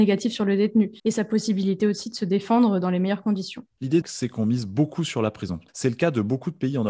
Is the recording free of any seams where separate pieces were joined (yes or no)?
no